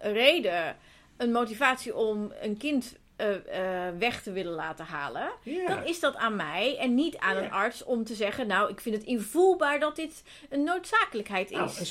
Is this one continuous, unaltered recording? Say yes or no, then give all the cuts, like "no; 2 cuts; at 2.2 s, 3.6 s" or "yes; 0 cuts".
yes; 0 cuts